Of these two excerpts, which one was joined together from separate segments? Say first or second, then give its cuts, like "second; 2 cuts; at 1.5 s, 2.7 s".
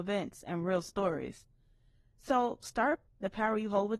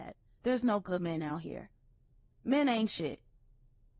first; 1 cut; at 3.1 s